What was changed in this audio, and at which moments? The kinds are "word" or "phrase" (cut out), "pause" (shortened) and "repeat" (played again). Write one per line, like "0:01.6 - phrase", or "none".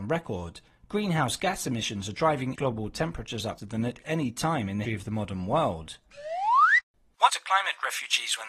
0:02.6 - word
0:03.6 - word
0:04.8 - word
0:07.3 - word